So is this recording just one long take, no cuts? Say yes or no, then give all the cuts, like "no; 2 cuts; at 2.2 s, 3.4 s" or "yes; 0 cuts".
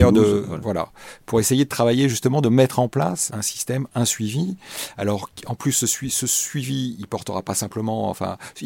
no; 1 cut; at 3.3 s